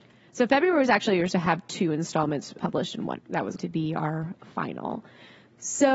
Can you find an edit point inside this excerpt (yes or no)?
yes